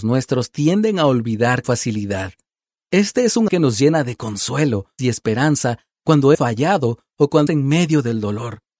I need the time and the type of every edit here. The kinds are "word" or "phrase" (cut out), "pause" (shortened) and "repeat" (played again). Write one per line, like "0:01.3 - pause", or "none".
0:01.6 - word
0:03.5 - word
0:05.0 - word
0:06.3 - word
0:07.5 - word